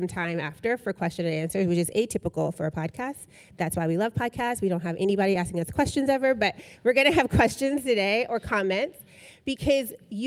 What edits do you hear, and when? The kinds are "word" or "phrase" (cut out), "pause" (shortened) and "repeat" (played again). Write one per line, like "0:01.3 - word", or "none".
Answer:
none